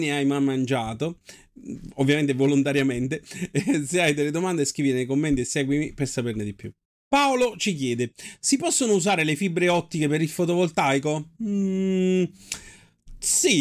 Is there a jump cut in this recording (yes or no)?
yes